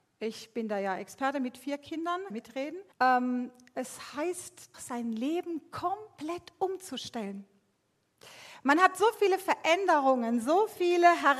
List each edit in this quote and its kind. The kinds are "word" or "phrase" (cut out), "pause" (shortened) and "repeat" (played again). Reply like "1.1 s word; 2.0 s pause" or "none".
2.3 s phrase; 2.9 s pause; 4.7 s word